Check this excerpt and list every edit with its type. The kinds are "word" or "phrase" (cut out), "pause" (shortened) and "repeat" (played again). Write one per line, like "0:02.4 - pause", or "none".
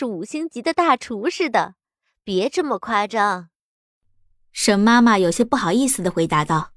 none